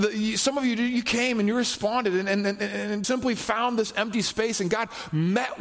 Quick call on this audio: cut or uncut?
cut